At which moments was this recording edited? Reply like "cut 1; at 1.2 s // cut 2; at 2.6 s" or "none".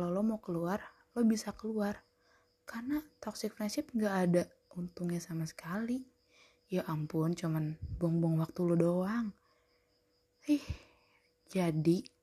none

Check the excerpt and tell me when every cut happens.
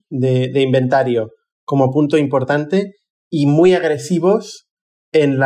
none

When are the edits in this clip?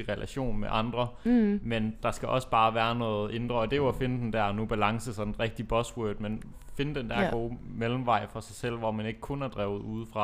none

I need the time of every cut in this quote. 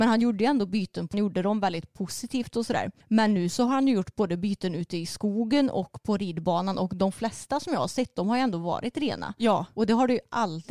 cut 1; at 1.1 s // cut 2; at 3.0 s

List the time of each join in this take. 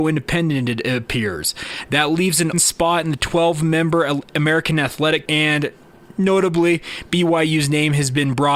cut 1; at 2.5 s // cut 2; at 5.3 s

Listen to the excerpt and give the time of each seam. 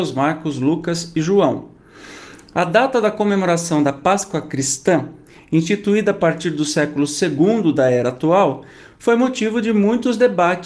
none

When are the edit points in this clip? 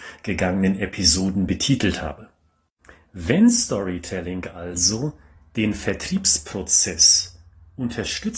none

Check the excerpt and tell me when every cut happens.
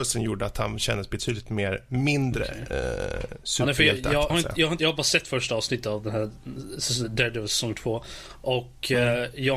cut 1; at 4.3 s // cut 2; at 4.8 s

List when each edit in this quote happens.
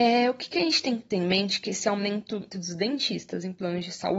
cut 1; at 2.5 s

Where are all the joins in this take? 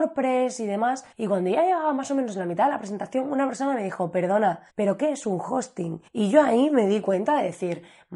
cut 1; at 1.1 s // cut 2; at 4.7 s // cut 3; at 6.1 s

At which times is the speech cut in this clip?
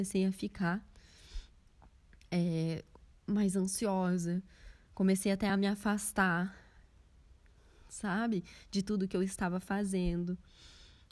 none

